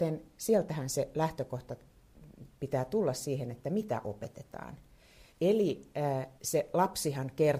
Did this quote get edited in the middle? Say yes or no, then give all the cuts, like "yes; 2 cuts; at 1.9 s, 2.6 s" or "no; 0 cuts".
yes; 2 cuts; at 5.3 s, 6.4 s